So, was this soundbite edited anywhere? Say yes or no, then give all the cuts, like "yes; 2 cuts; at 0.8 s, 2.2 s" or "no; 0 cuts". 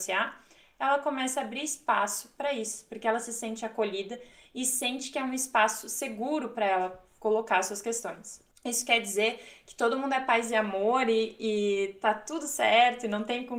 no; 0 cuts